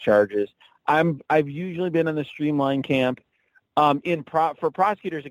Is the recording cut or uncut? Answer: uncut